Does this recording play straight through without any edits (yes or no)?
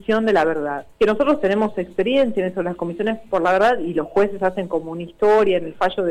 no